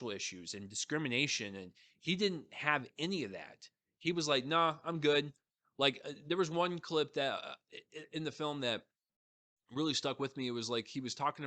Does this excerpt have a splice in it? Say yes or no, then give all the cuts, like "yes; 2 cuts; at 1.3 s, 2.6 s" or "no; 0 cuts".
no; 0 cuts